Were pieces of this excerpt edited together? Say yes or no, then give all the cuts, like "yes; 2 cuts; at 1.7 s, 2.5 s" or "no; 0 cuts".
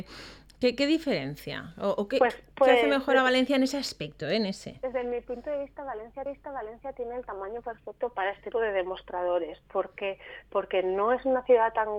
yes; 2 cuts; at 6.3 s, 8.5 s